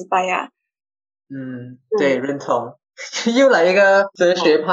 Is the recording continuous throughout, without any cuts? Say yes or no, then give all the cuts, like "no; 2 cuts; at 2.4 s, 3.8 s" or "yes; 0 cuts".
yes; 0 cuts